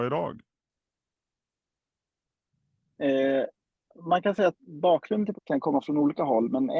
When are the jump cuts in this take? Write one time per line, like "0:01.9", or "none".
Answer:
0:04.6
0:05.3